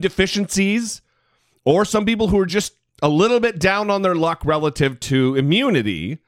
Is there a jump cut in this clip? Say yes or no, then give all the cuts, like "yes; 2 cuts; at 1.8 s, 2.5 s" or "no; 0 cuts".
no; 0 cuts